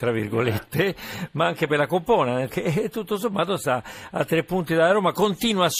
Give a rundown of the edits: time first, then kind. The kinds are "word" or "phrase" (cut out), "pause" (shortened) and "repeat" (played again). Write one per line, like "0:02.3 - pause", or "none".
0:02.5 - word